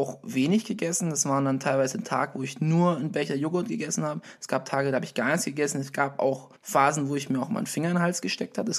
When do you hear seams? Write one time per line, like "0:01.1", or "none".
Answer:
0:06.6